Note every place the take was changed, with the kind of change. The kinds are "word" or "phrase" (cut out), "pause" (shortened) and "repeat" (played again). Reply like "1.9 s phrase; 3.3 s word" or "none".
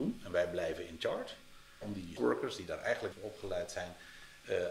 1.8 s phrase; 2.2 s word; 3.1 s word